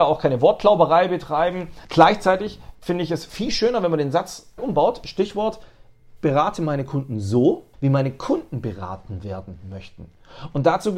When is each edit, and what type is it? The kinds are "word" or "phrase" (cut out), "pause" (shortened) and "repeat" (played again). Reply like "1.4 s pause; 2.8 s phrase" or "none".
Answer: 4.6 s phrase; 6.2 s word; 7.7 s pause